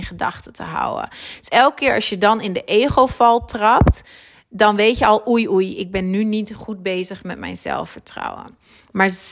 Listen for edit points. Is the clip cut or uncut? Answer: uncut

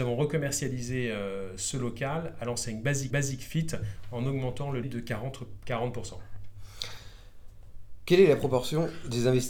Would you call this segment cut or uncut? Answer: cut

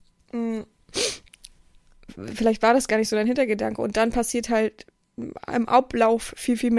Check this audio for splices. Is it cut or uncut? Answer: uncut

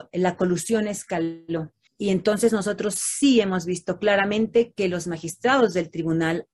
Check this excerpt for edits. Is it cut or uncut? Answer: cut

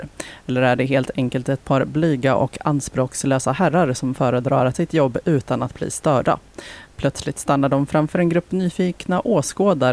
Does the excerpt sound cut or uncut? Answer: cut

